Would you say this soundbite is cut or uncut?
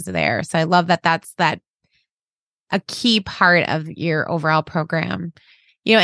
uncut